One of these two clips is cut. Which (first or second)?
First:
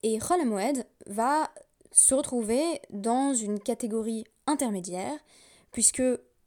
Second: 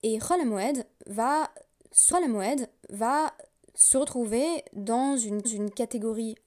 second